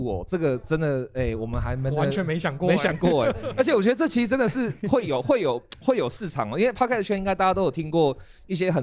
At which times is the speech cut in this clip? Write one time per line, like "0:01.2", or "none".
none